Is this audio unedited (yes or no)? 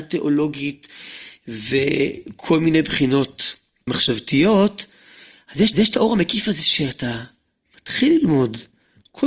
no